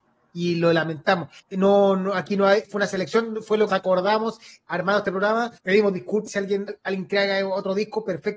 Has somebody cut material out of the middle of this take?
yes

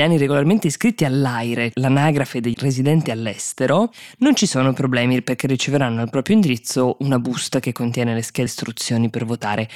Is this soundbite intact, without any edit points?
no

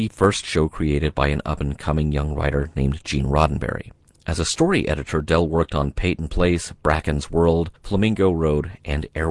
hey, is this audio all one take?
no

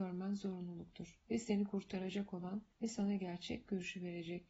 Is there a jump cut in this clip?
yes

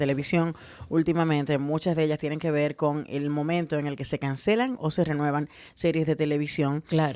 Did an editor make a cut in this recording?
no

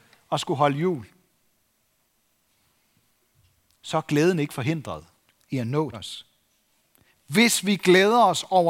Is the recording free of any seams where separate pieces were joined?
no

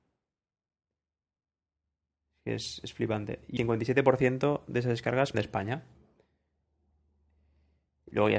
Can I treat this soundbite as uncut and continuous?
no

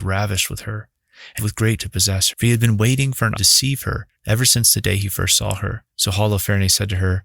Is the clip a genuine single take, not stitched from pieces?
no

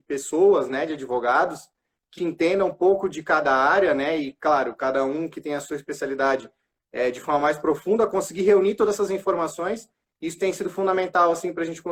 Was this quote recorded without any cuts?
no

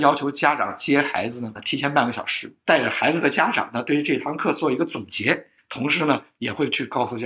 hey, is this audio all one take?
no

